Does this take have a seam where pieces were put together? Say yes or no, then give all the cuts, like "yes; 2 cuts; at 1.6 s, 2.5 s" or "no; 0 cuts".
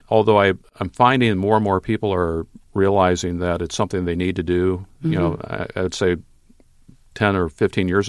no; 0 cuts